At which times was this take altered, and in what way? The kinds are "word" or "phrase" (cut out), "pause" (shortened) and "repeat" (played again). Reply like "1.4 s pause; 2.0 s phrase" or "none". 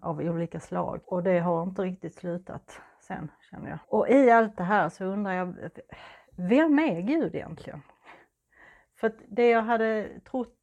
1.0 s pause; 3.8 s pause